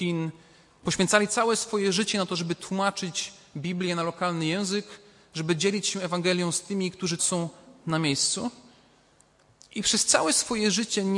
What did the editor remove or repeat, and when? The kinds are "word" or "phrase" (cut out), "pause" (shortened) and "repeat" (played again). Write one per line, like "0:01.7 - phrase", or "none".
0:07.2 - word